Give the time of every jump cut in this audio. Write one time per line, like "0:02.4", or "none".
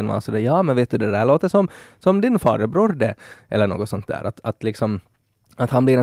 none